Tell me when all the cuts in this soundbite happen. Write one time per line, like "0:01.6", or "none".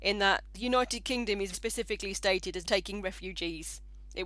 0:01.5
0:02.6